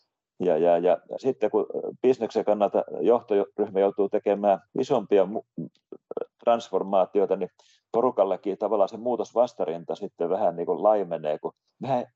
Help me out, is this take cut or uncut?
cut